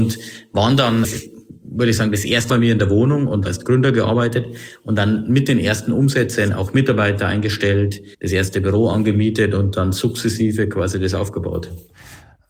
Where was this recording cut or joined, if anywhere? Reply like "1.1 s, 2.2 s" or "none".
1.0 s, 2.5 s, 3.5 s, 8.1 s